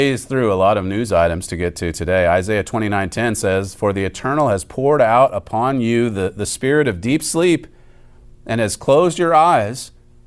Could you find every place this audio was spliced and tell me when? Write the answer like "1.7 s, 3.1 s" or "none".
none